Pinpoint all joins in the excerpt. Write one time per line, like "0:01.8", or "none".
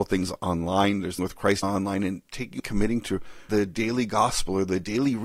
0:01.2
0:01.6
0:02.6
0:03.5